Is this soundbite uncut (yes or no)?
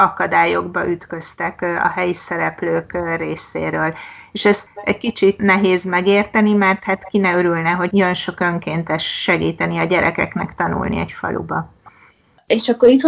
yes